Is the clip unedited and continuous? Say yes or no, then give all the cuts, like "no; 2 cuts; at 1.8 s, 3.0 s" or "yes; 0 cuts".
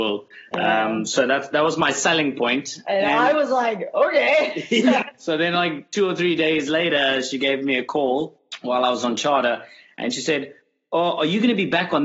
yes; 0 cuts